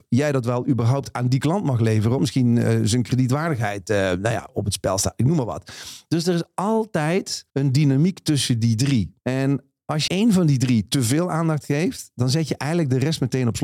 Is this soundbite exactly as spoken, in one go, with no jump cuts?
no; 4 cuts; at 2.2 s, 7.5 s, 9.2 s, 10.1 s

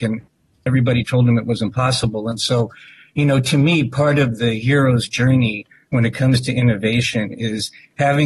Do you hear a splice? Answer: no; 0 cuts

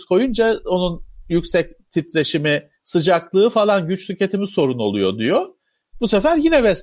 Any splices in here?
yes; 1 cut; at 2.7 s

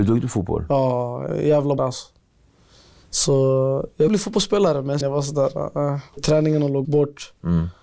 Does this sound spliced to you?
yes; 6 cuts; at 1.3 s, 1.8 s, 4.1 s, 5.0 s, 6.2 s, 6.8 s

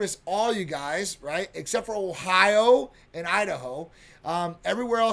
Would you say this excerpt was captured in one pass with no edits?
yes; 0 cuts

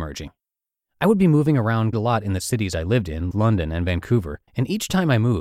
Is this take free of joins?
no; 3 cuts; at 1.9 s, 3.3 s, 4.5 s

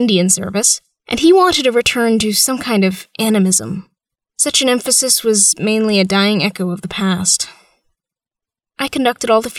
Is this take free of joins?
yes; 0 cuts

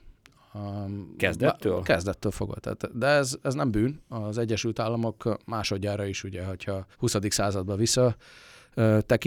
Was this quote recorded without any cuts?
no; 1 cut; at 6.9 s

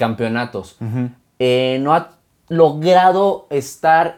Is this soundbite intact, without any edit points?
yes; 0 cuts

